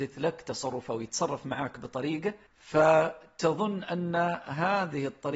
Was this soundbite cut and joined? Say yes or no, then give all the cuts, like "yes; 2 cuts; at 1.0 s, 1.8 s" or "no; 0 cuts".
yes; 1 cut; at 2.5 s